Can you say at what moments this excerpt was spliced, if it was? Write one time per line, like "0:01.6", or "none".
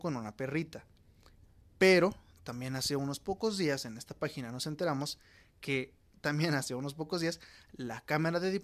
none